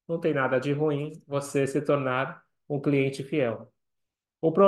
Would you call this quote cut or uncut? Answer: uncut